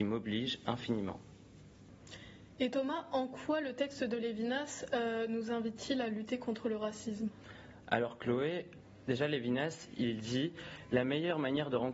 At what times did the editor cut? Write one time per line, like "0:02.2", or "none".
none